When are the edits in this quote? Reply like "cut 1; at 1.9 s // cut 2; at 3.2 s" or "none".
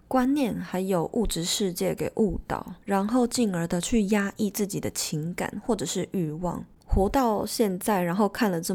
cut 1; at 2.8 s